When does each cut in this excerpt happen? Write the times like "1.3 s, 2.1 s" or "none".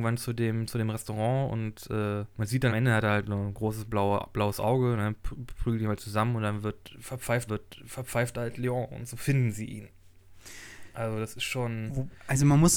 2.3 s, 2.7 s, 7.5 s